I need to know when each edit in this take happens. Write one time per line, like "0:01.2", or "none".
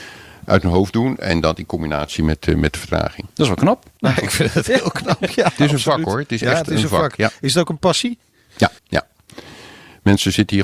0:03.3
0:08.8